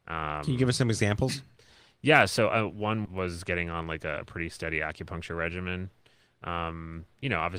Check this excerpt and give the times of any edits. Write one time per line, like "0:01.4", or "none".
0:03.0